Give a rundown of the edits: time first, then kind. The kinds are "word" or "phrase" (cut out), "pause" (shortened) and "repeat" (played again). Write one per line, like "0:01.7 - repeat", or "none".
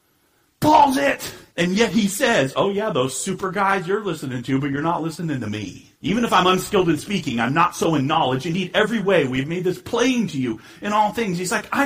0:01.5 - pause
0:05.9 - pause